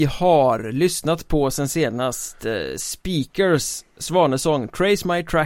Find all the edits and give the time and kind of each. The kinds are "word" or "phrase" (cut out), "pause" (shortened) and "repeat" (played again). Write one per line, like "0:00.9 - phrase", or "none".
none

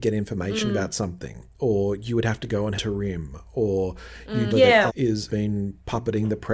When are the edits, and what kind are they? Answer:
0:02.8 - phrase
0:04.5 - word
0:04.9 - word
0:05.3 - word

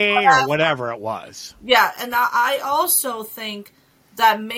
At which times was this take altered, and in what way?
none

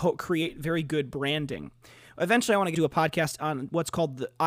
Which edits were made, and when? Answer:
0:02.7 - word

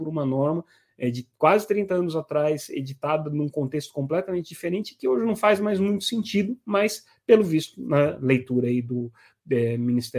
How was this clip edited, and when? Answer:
none

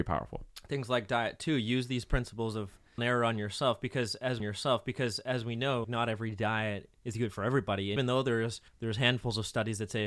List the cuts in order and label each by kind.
0:03.0 - phrase
0:04.4 - repeat
0:05.8 - word
0:07.0 - pause
0:08.0 - word
0:08.7 - pause

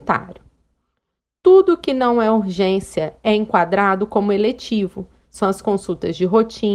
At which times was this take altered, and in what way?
none

